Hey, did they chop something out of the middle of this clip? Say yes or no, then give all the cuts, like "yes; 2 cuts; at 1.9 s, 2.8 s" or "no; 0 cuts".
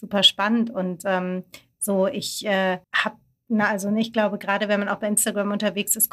yes; 1 cut; at 2.8 s